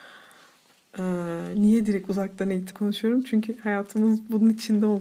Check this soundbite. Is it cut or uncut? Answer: cut